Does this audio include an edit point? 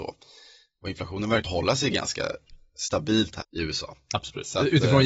yes; 2 cuts; at 1.5 s, 3.4 s

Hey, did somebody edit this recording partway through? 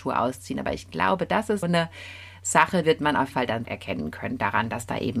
yes; 4 cuts; at 1.6 s, 2.8 s, 3.3 s, 3.6 s

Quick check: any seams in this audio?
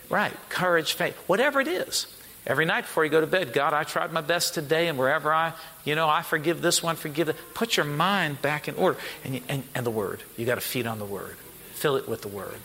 no; 0 cuts

